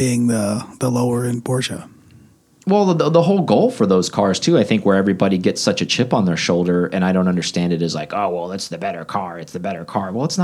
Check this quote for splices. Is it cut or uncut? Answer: uncut